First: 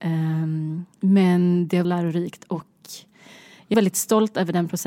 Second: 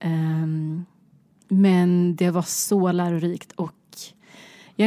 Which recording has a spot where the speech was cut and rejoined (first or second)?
first